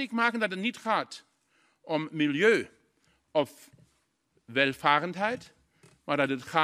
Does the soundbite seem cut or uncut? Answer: uncut